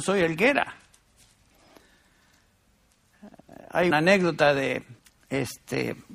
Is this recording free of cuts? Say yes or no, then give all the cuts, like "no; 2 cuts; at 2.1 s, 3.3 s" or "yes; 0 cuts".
no; 2 cuts; at 3.9 s, 5.0 s